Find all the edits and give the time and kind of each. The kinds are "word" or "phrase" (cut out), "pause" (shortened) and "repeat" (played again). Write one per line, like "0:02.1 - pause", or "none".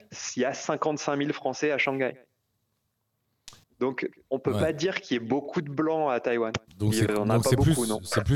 0:03.6 - pause
0:06.7 - pause